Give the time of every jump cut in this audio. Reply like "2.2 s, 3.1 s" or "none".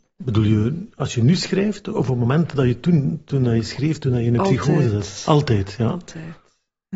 none